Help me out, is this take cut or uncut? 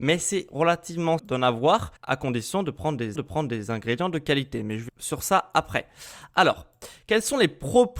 cut